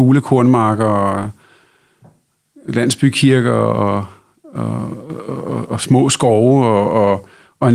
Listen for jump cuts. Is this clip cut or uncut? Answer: uncut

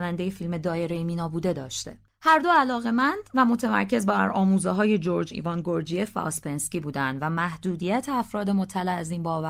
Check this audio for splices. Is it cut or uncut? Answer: uncut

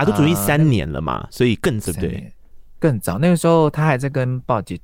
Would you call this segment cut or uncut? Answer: cut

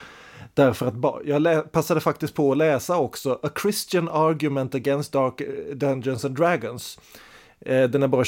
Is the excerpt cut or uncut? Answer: uncut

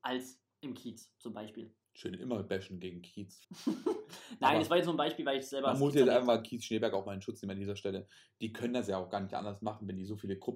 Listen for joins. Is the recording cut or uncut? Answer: cut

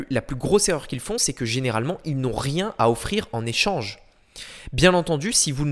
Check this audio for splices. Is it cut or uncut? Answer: uncut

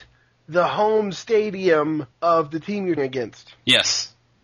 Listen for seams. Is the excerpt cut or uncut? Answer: cut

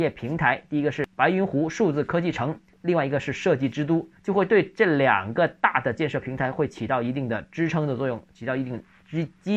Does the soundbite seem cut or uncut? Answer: cut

